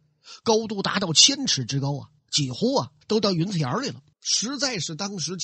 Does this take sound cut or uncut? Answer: cut